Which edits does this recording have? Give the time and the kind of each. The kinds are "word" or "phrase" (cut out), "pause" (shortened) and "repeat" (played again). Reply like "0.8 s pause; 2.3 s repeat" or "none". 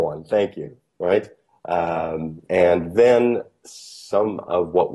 2.5 s word